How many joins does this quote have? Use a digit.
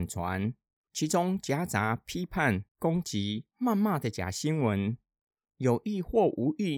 1